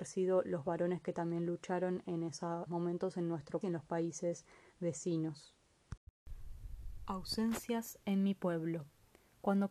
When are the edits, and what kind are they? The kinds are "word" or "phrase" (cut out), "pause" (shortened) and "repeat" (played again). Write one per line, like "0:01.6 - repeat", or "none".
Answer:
0:02.7 - word
0:03.6 - word